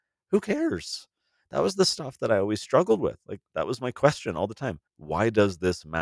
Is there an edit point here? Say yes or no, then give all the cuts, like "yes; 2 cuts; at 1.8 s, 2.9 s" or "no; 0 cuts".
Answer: yes; 2 cuts; at 3.5 s, 4.9 s